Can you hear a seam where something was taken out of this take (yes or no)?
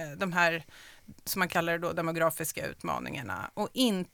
no